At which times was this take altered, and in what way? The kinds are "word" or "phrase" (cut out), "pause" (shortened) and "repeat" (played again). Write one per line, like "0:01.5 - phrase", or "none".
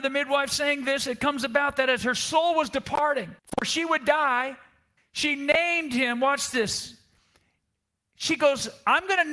0:03.4 - pause
0:05.0 - pause